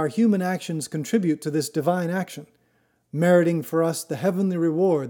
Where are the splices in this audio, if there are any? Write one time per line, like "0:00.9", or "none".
none

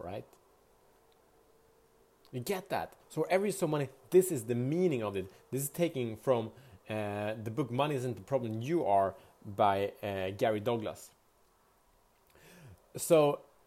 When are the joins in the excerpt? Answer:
0:03.0

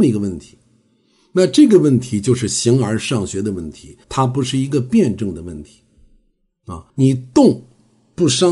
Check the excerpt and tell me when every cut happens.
0:04.0
0:06.9

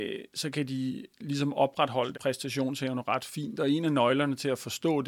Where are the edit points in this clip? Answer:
0:02.1

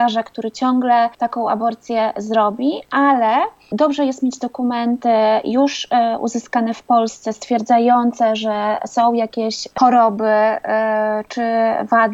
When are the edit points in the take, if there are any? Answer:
0:01.1

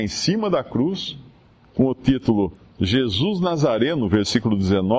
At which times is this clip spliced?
none

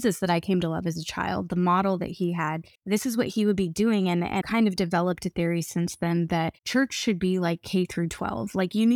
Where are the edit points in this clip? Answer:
0:02.7
0:04.4
0:06.6

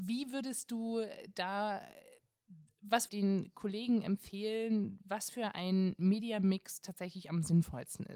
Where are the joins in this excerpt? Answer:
0:03.1

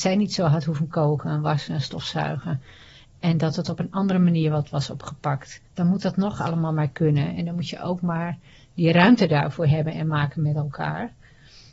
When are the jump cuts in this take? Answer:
0:05.7

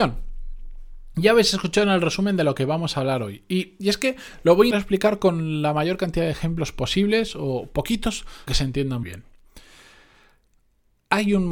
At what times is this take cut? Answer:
0:04.7
0:08.5
0:09.0

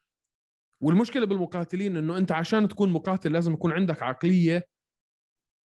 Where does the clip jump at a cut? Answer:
none

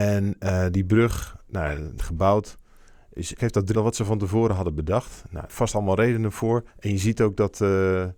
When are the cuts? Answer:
0:02.0
0:03.4
0:03.7
0:05.5
0:06.7

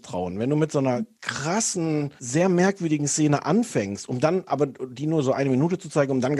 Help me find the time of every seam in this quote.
0:02.2

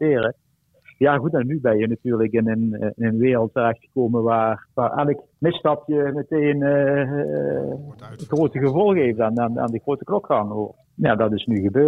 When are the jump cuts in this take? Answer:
none

